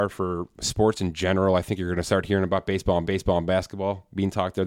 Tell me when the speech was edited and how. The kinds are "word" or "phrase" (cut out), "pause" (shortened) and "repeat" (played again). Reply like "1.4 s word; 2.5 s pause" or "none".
3.1 s repeat